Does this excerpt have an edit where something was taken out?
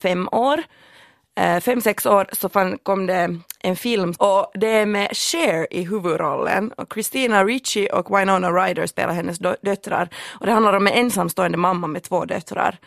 no; 0 cuts

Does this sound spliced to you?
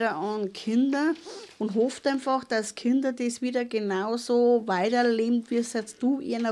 no; 0 cuts

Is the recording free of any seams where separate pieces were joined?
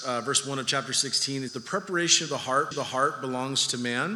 no; 2 cuts; at 1.5 s, 2.7 s

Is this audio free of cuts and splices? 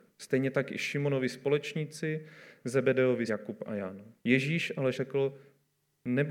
no; 3 cuts; at 3.3 s, 4.2 s, 4.9 s

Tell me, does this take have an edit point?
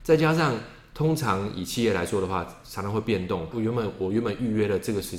yes; 1 cut; at 3.5 s

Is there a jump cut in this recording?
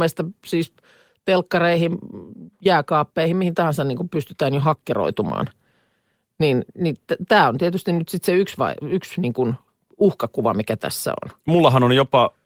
no; 0 cuts

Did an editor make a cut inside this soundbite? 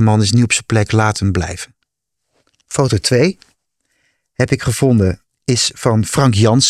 no; 0 cuts

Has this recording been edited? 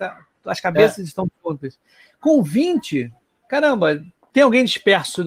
no; 0 cuts

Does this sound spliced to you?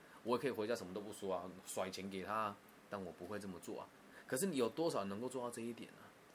yes; 1 cut; at 2.8 s

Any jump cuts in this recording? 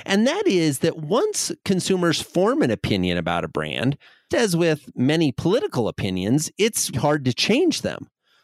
yes; 2 cuts; at 4.3 s, 6.9 s

